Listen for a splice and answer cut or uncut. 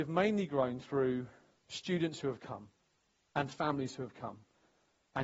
uncut